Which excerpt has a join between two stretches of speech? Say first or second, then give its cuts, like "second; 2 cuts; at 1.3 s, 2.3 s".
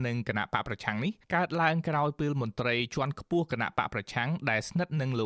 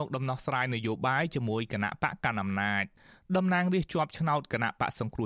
first; 1 cut; at 1.2 s